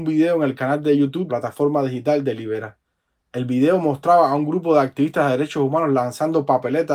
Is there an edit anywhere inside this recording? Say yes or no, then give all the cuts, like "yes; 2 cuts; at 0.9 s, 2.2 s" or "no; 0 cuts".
yes; 1 cut; at 1.3 s